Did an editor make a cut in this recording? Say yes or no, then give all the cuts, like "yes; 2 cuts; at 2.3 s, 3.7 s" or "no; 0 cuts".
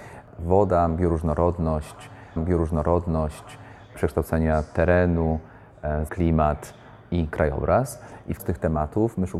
yes; 3 cuts; at 2.4 s, 6.1 s, 8.4 s